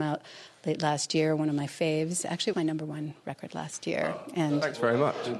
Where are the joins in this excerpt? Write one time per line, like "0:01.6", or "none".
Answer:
0:02.5